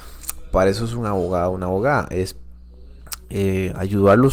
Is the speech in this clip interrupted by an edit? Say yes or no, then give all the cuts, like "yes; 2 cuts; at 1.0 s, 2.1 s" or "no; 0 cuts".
no; 0 cuts